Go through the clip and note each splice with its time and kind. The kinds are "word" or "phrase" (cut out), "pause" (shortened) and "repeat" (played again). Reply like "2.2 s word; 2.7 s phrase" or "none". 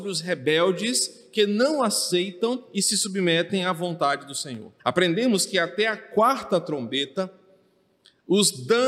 4.8 s pause